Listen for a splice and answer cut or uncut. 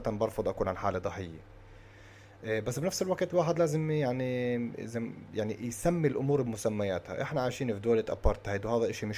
uncut